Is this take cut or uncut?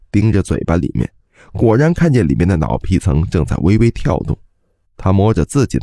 uncut